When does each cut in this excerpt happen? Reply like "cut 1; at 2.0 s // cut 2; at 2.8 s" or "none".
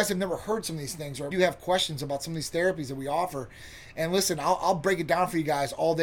cut 1; at 1.3 s

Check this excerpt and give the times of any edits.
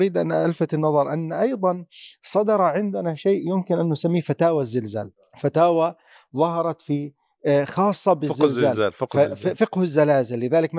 none

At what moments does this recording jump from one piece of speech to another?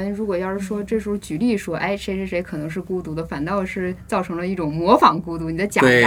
none

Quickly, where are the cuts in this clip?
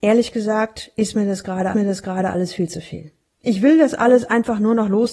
cut 1; at 1.7 s

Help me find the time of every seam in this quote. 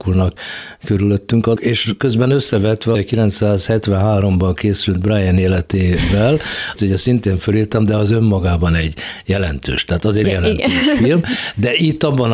cut 1; at 1.6 s // cut 2; at 2.9 s // cut 3; at 6.8 s // cut 4; at 10.2 s

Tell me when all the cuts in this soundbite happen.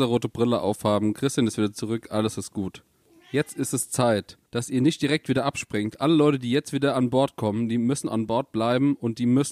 cut 1; at 3.0 s // cut 2; at 4.5 s

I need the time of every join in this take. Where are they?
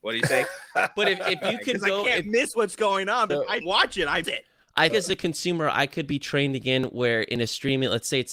cut 1; at 3.3 s // cut 2; at 3.6 s // cut 3; at 4.2 s // cut 4; at 4.9 s

